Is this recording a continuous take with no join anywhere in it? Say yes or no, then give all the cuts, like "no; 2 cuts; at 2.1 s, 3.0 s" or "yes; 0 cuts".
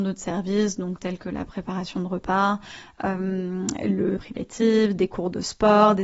no; 1 cut; at 4.2 s